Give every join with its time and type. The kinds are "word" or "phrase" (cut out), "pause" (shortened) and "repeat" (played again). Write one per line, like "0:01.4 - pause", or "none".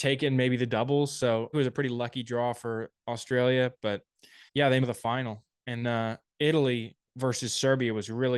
0:01.5 - phrase
0:04.5 - pause
0:04.8 - phrase
0:05.8 - word

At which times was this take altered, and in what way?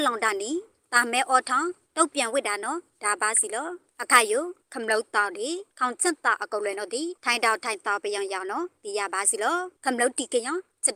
0:05.7 - pause
0:07.2 - pause
0:09.8 - pause

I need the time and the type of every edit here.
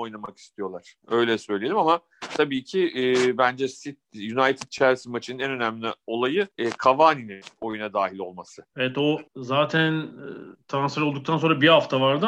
0:01.0 - pause
0:06.5 - pause
0:08.7 - pause
0:09.3 - pause

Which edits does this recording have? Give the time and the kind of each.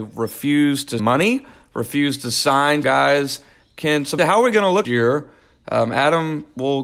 0:01.0 - word
0:02.8 - word
0:04.2 - word
0:04.8 - word

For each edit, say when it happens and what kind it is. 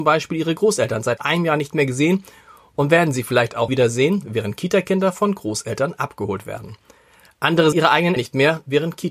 0:01.2 - word
0:03.7 - word
0:07.7 - word
0:08.2 - word

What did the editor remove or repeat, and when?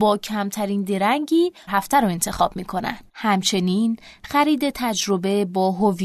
0:01.7 - word
0:03.1 - pause

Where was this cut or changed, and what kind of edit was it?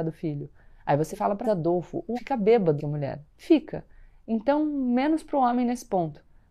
0:01.1 - word
0:01.4 - phrase
0:02.2 - word
0:02.8 - word

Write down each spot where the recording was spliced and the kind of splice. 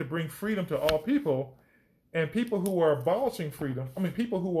none

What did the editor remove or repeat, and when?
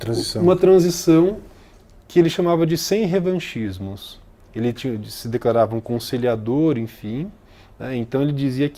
none

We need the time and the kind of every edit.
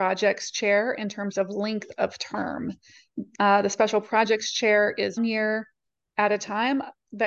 0:05.2 - word

